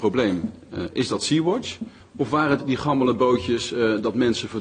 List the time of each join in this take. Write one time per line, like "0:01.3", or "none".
0:02.0
0:02.6